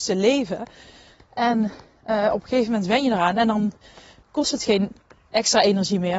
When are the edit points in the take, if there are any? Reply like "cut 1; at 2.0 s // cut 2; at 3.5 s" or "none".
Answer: none

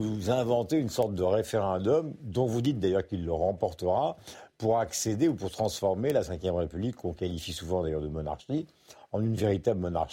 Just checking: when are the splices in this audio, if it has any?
none

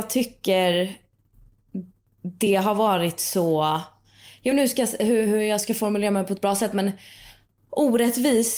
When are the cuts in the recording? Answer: none

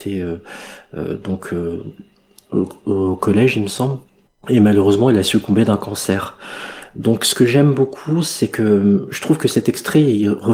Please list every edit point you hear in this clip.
none

